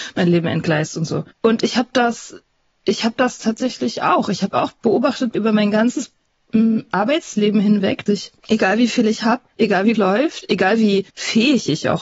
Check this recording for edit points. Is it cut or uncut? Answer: cut